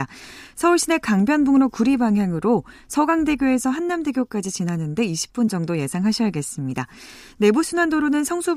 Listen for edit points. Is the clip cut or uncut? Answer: uncut